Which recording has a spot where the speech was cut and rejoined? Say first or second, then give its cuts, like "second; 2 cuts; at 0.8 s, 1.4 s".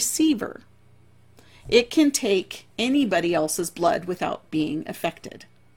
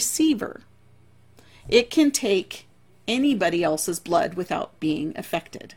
first; 1 cut; at 2.7 s